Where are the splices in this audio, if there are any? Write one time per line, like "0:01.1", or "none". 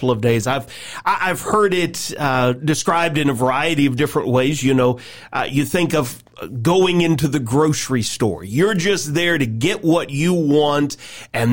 none